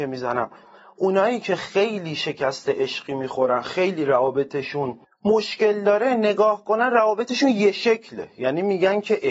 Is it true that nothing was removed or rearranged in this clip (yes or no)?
no